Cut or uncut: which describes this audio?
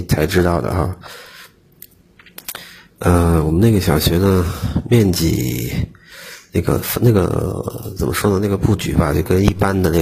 uncut